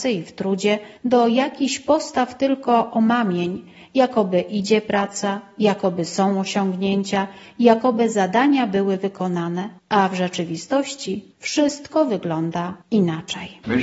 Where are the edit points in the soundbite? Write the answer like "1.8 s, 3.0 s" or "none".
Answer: 1.0 s, 9.8 s, 11.3 s, 12.8 s